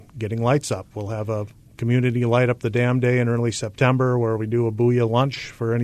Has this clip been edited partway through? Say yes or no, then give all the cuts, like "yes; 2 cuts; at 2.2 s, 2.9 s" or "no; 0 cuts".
no; 0 cuts